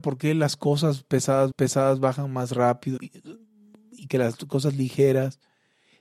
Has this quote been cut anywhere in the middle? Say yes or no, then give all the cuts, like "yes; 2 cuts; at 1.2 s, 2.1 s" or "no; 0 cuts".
yes; 3 cuts; at 1.5 s, 3.0 s, 4.1 s